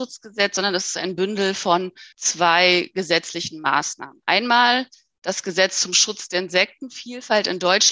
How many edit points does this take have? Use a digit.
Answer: 2